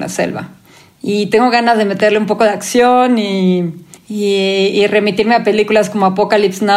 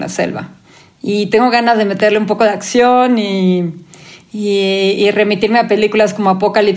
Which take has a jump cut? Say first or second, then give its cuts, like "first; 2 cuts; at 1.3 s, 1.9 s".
first; 1 cut; at 4.0 s